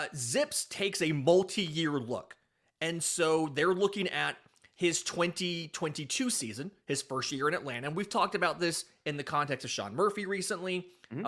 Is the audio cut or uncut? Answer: uncut